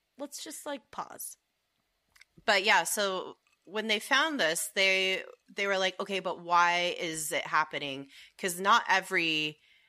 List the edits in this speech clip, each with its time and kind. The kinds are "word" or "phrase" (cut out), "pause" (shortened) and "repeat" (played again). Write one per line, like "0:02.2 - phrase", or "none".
none